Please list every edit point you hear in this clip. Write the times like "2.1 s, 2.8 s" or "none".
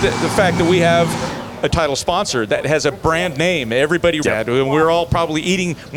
1.7 s, 4.2 s